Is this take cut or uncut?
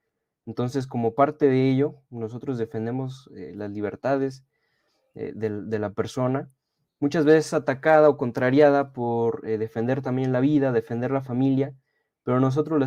uncut